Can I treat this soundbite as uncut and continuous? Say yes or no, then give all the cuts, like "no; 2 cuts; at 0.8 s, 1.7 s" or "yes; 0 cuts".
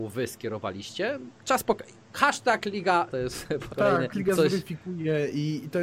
no; 4 cuts; at 1.3 s, 3.1 s, 3.7 s, 4.1 s